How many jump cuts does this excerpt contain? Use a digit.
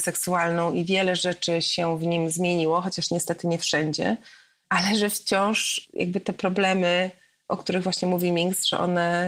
0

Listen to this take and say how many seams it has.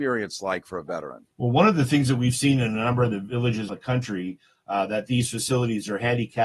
2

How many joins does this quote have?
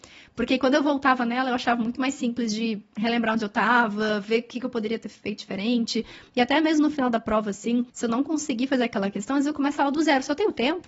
1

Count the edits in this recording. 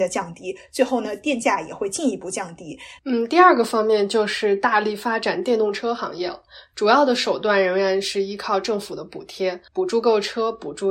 2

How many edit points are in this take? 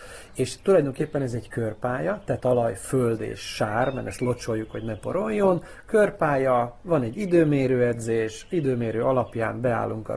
1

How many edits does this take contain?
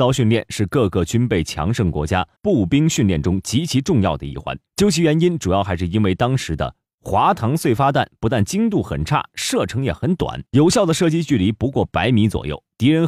3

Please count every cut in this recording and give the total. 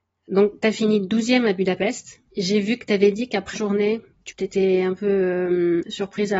2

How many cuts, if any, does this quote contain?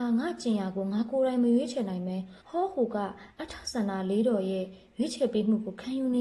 1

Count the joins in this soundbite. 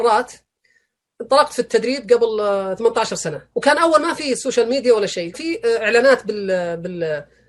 2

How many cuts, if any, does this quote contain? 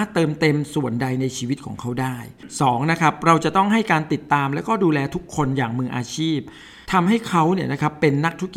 1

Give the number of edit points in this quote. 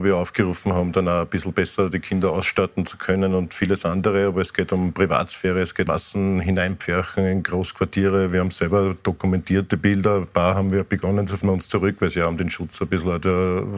2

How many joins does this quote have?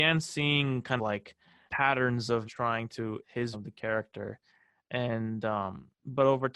5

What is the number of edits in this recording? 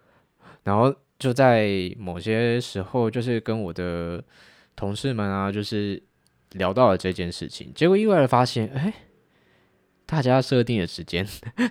0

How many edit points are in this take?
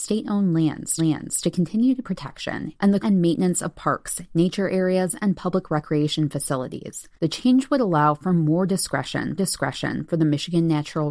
5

